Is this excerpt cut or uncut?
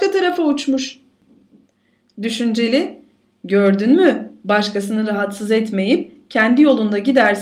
uncut